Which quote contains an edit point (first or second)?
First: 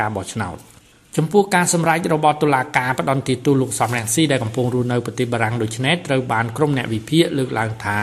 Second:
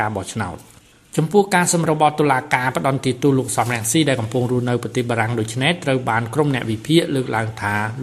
second